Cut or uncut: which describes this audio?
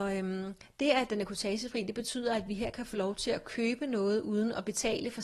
uncut